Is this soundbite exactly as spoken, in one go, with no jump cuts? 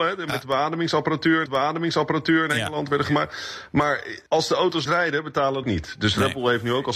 no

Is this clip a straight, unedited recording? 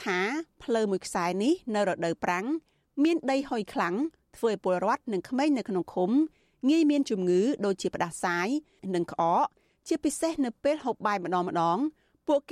yes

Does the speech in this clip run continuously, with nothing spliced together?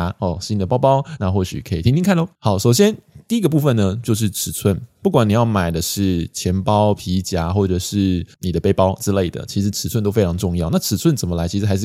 no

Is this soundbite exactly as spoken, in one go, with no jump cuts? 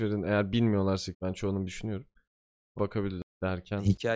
no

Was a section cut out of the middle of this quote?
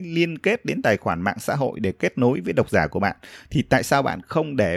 no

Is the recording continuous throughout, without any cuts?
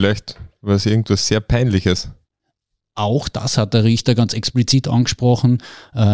yes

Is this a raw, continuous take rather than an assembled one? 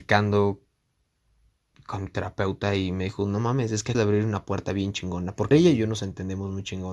no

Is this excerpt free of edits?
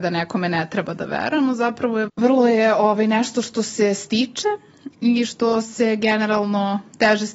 no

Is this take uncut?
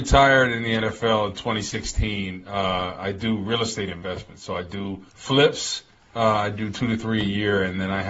no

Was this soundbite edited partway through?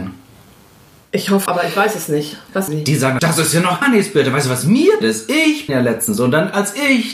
yes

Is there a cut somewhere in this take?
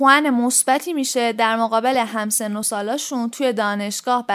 no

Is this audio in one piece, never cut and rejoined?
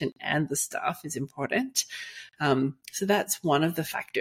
yes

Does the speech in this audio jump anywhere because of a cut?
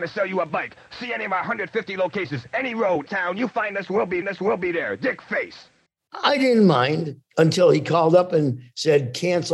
yes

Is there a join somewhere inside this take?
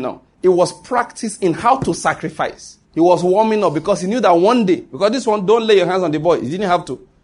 yes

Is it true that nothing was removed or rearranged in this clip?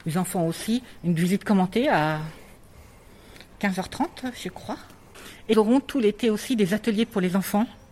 no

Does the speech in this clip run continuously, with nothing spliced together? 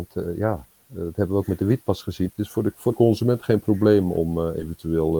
no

